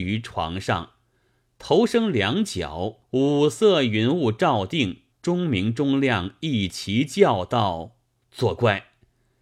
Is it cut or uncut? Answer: cut